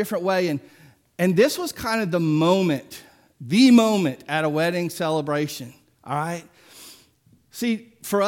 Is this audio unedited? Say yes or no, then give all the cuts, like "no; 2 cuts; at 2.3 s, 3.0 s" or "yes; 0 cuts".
yes; 0 cuts